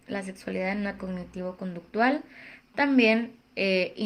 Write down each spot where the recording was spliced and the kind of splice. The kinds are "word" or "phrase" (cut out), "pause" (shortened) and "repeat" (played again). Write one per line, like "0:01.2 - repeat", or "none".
0:01.0 - word